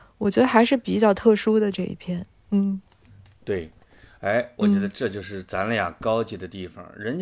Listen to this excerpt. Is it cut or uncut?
uncut